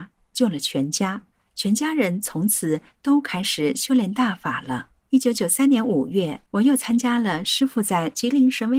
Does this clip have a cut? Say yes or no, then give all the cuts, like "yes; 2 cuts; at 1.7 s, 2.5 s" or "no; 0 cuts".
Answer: yes; 3 cuts; at 1.3 s, 5.0 s, 6.5 s